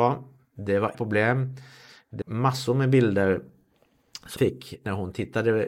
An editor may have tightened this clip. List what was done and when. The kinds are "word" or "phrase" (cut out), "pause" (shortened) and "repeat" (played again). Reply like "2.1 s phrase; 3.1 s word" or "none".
0.9 s word; 2.2 s word; 4.4 s word